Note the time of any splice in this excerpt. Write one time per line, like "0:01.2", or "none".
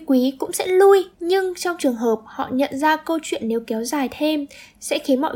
0:01.1